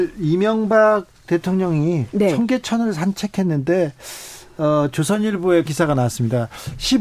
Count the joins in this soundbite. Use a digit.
1